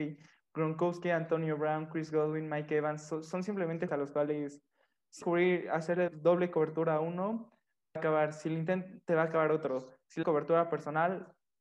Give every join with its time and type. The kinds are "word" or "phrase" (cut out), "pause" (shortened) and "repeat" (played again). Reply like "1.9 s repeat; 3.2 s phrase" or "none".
3.9 s word; 5.2 s word; 6.1 s word; 8.0 s word; 10.2 s word